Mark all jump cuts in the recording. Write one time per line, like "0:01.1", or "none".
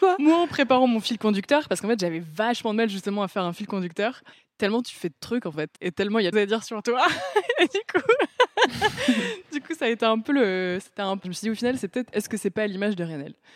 0:04.3
0:05.8
0:06.3
0:11.2